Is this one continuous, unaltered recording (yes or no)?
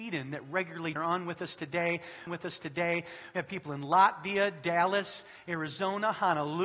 no